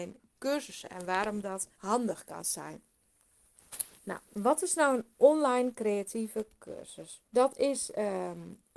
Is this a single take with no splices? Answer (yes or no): no